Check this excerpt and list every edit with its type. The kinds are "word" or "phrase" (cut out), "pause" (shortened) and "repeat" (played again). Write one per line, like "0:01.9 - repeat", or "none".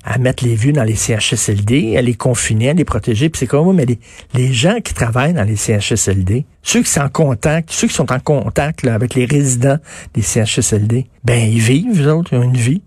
0:06.5 - pause
0:11.2 - pause